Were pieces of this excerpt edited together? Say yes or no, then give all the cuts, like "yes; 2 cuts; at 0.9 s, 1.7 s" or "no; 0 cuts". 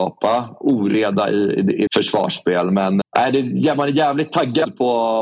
yes; 2 cuts; at 1.9 s, 3.0 s